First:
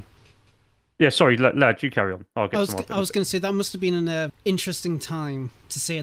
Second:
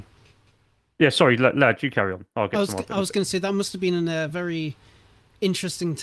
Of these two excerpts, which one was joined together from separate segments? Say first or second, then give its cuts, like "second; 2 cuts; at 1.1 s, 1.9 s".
first; 1 cut; at 4.3 s